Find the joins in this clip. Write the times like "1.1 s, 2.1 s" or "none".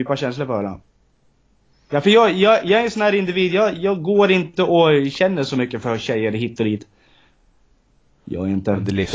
none